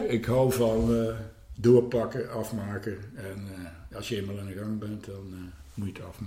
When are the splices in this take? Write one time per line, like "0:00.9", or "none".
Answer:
none